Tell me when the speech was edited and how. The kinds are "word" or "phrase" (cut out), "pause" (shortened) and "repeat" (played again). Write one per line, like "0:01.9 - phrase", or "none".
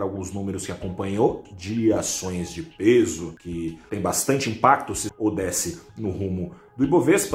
0:05.1 - word